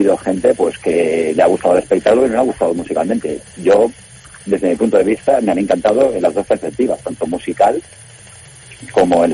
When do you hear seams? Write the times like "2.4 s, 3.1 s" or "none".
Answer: none